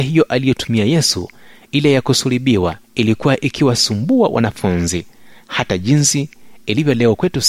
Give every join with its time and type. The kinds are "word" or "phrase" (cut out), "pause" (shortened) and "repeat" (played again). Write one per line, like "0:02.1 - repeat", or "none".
0:02.8 - pause